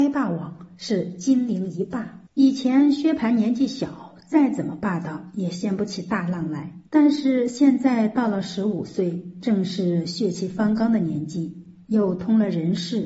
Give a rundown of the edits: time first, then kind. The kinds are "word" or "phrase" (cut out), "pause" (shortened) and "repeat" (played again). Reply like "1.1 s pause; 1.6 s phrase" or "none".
2.3 s pause; 6.9 s pause